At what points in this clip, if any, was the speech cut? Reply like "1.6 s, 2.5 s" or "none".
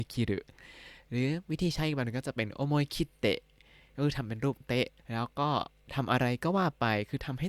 5.0 s